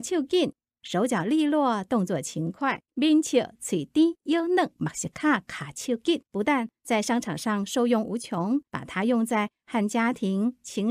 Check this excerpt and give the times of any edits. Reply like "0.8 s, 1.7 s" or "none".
2.8 s, 6.3 s, 8.7 s